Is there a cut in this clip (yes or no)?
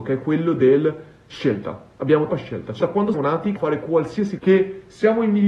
yes